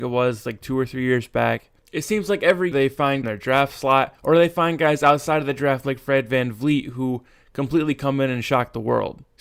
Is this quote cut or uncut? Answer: cut